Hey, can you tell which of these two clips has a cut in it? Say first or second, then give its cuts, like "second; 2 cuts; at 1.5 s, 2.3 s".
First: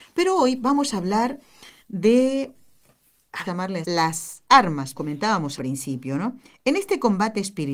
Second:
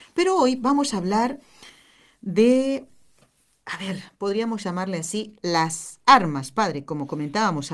first; 5 cuts; at 1.8 s, 3.4 s, 3.8 s, 5.0 s, 5.6 s